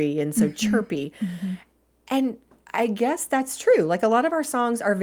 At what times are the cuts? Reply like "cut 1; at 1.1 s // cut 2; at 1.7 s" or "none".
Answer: none